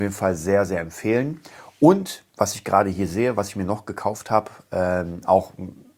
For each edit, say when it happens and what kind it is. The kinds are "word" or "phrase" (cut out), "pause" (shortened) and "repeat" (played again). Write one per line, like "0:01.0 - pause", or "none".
0:02.3 - pause